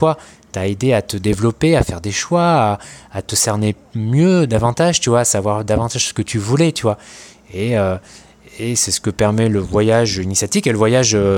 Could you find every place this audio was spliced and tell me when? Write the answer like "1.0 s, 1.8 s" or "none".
none